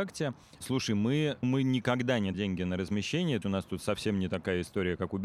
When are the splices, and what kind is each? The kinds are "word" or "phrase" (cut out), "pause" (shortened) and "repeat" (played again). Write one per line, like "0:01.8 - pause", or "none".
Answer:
0:01.4 - word
0:02.3 - word
0:03.4 - word